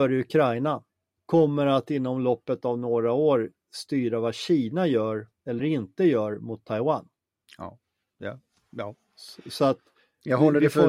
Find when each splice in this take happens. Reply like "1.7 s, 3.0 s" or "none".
none